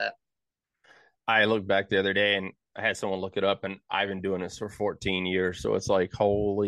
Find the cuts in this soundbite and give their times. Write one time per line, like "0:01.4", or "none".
none

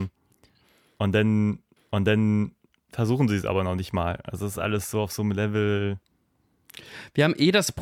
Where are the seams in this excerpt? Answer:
0:01.8

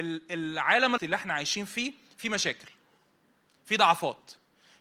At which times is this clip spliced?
0:01.0

